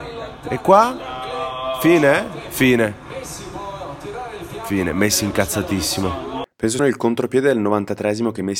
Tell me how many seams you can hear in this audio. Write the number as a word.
one